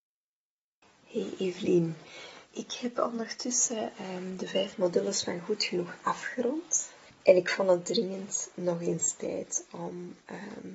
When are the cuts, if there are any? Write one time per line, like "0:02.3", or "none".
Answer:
0:02.4
0:07.1